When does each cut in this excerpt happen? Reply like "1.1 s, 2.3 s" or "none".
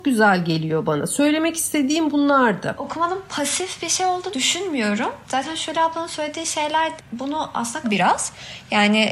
4.3 s, 7.0 s, 7.8 s